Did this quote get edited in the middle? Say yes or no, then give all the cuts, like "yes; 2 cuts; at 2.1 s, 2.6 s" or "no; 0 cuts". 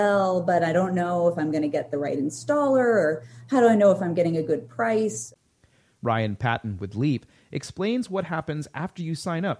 no; 0 cuts